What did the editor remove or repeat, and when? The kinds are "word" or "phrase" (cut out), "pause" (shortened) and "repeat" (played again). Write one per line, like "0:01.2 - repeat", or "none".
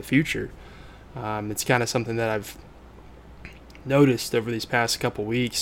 none